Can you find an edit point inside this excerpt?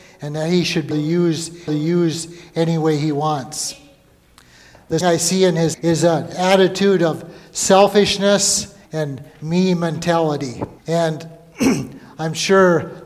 yes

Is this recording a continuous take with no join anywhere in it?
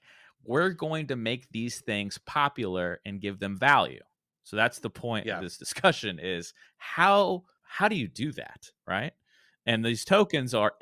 yes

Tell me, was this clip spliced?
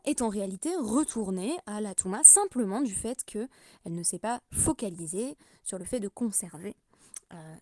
no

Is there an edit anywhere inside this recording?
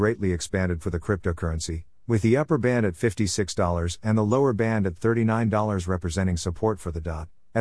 no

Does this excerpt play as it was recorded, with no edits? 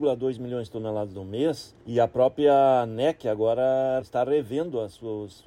no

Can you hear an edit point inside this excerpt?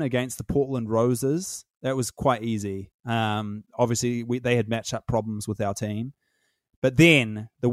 no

